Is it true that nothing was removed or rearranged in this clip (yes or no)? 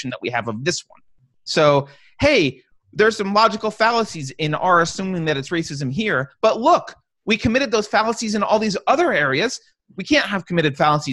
yes